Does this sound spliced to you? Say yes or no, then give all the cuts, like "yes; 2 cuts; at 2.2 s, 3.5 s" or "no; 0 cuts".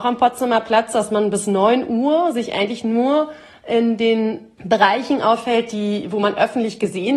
no; 0 cuts